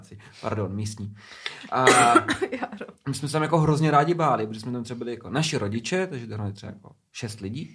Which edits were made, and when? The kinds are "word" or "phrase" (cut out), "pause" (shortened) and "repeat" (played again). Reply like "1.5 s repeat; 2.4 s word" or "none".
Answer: none